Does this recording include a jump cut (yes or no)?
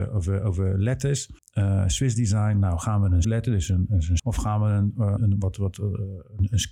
yes